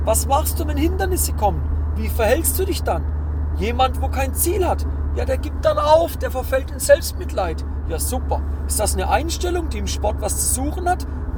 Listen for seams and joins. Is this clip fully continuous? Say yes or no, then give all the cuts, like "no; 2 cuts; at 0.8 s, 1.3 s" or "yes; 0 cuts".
yes; 0 cuts